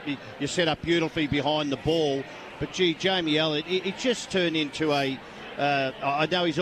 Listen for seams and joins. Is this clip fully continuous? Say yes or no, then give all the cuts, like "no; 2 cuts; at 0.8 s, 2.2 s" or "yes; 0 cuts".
yes; 0 cuts